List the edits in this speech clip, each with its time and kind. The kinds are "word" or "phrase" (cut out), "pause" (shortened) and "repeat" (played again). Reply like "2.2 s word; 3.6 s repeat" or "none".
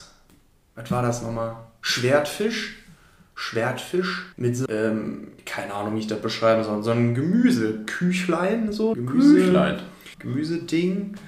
4.3 s pause; 4.7 s word; 5.4 s pause; 8.9 s word; 10.1 s pause